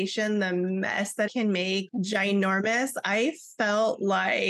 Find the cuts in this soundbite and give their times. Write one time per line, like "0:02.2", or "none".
0:01.3
0:01.9